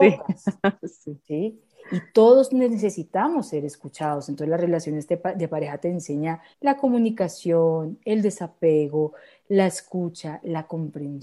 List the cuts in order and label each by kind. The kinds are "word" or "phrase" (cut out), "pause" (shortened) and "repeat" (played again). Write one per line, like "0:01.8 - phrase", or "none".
0:06.5 - pause